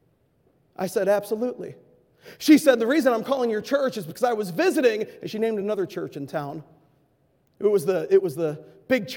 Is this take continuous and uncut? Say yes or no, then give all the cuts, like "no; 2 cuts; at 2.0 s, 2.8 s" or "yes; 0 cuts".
yes; 0 cuts